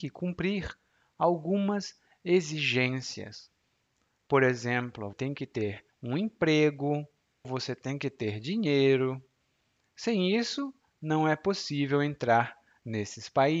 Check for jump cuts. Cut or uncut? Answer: cut